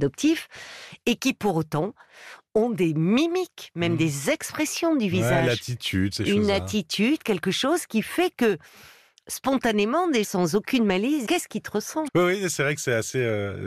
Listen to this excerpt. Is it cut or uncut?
cut